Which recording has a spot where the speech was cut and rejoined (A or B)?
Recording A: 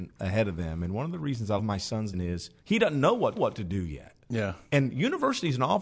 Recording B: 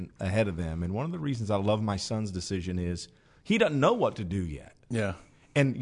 A